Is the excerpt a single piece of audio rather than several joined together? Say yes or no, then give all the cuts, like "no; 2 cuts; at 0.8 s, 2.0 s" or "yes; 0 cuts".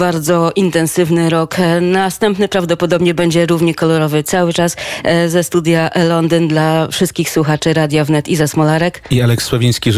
yes; 0 cuts